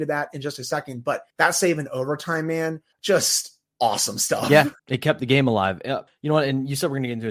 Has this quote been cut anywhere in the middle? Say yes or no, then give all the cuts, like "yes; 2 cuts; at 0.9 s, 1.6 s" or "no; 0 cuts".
yes; 4 cuts; at 1.3 s, 2.9 s, 4.8 s, 6.1 s